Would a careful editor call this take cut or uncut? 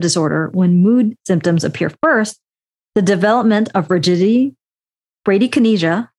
uncut